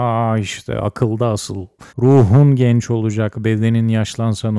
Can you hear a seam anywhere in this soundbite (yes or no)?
yes